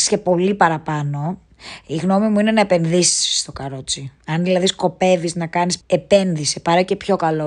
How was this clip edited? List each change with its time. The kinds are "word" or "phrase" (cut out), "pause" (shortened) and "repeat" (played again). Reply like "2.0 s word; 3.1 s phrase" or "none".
5.8 s phrase